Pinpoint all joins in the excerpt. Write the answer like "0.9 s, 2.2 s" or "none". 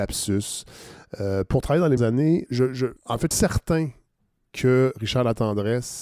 2.0 s, 2.5 s, 3.0 s, 3.3 s